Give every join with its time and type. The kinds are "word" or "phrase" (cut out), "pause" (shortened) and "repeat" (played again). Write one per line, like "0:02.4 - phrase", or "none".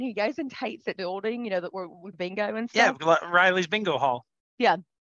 0:01.0 - phrase
0:02.1 - word